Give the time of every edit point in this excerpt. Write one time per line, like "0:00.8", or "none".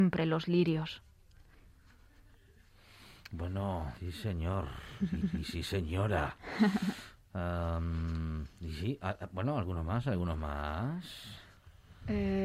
0:04.0
0:05.2